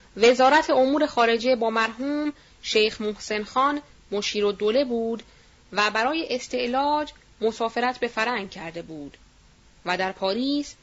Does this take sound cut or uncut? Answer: uncut